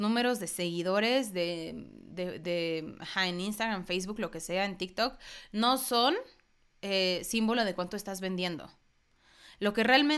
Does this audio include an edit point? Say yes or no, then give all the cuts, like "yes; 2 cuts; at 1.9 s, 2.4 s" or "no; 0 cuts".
no; 0 cuts